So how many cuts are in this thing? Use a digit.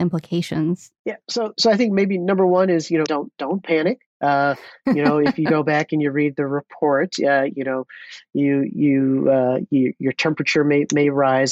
3